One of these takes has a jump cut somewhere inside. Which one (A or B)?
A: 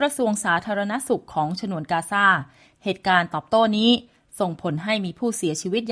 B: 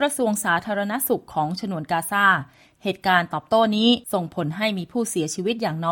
B